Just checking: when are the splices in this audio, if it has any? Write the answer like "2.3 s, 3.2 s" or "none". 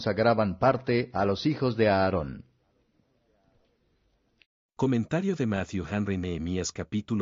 none